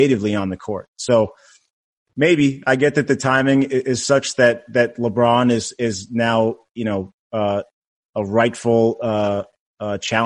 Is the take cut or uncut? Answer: uncut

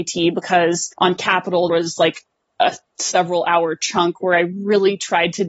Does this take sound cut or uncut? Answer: cut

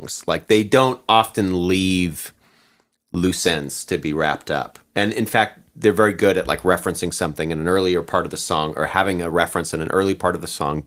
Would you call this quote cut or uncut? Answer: uncut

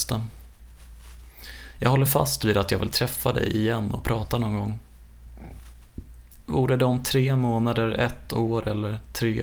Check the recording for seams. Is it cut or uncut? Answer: uncut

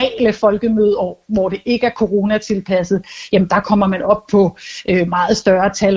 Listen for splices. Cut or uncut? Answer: uncut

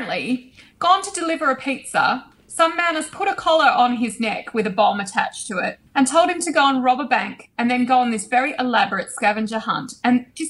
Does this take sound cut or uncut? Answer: cut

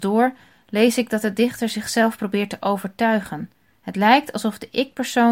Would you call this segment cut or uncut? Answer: cut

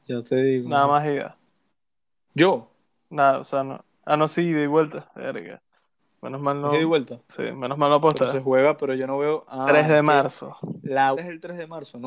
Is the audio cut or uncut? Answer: cut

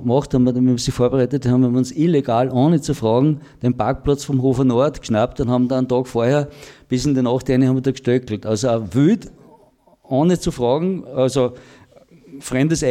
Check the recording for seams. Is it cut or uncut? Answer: uncut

